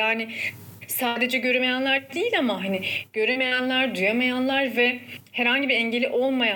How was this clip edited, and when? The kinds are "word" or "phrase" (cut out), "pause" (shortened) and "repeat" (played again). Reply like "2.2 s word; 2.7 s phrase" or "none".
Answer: none